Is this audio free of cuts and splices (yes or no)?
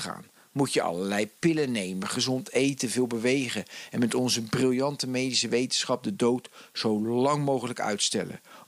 yes